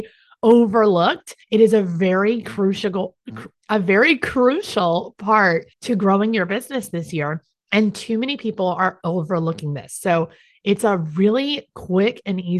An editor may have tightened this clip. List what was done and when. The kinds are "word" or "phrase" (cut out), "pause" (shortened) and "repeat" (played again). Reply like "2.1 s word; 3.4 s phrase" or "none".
1.4 s pause; 3.6 s pause; 5.7 s pause